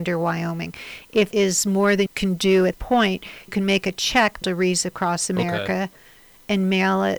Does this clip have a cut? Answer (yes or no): yes